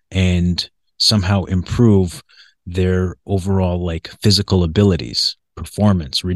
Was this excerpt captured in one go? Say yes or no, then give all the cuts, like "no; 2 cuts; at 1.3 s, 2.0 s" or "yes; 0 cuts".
yes; 0 cuts